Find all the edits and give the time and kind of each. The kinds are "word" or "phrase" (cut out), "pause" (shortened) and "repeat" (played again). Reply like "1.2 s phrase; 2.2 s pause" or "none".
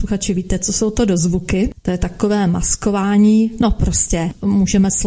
none

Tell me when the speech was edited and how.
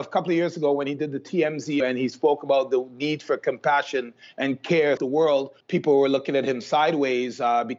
1.8 s word; 5.0 s word; 5.6 s pause

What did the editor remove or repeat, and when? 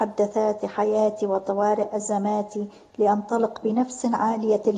none

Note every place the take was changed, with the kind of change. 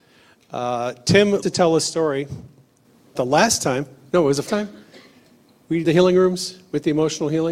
1.4 s word; 3.1 s word; 4.5 s word; 5.8 s word

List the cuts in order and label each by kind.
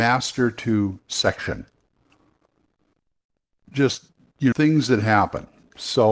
4.5 s word

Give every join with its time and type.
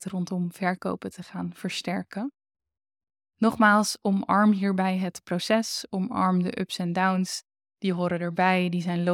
none

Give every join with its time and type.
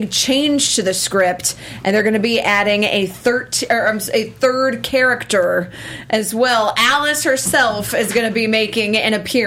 none

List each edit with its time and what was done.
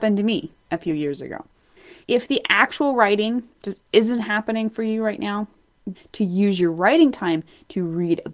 2.0 s pause; 5.9 s phrase

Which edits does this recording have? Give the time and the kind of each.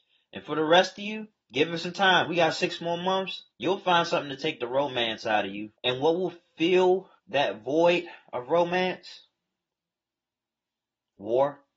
1.4 s pause; 3.5 s pause; 5.7 s pause; 7.2 s pause

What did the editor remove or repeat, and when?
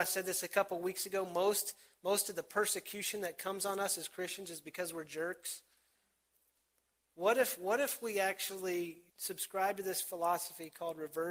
9.1 s pause

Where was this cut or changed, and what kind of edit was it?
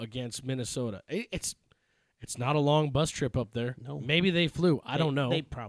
none

